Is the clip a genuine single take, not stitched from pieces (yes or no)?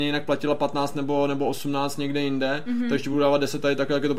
yes